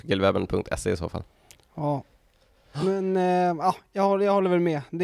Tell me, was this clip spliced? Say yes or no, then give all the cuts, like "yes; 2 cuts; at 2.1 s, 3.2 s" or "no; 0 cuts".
no; 0 cuts